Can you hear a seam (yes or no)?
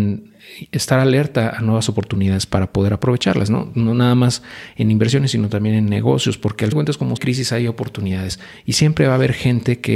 yes